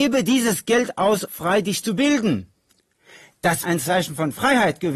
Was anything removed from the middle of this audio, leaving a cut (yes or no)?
yes